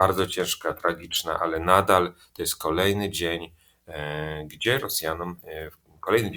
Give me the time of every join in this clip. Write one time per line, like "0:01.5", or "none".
none